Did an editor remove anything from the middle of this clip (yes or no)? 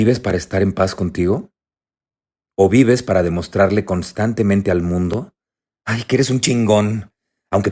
no